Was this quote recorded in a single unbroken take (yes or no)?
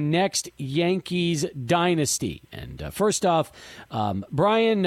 yes